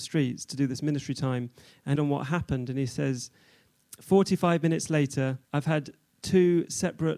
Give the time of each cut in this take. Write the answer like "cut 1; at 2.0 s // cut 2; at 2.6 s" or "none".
cut 1; at 2.0 s // cut 2; at 5.4 s